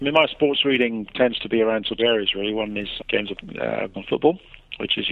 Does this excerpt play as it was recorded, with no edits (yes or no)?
no